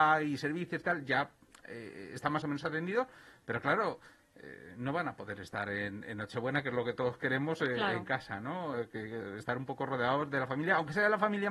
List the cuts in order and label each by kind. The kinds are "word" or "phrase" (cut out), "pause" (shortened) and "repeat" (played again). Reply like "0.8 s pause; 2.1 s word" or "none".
none